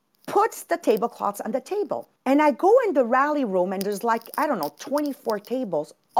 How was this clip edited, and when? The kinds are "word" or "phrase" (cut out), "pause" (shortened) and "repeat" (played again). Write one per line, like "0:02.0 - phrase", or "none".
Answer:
0:02.2 - pause